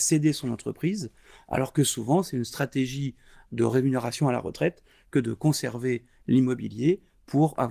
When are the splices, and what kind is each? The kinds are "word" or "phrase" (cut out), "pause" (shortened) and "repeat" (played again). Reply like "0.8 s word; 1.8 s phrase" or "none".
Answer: none